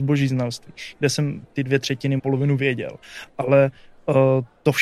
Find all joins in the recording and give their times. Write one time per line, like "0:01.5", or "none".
0:01.4
0:02.2